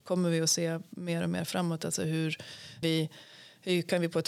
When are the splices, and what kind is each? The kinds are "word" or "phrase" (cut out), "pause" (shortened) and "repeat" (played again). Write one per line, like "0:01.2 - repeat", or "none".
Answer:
0:02.8 - phrase